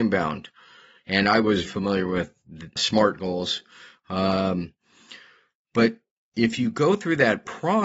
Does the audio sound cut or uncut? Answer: cut